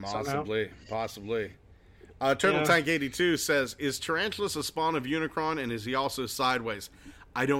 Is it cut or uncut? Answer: uncut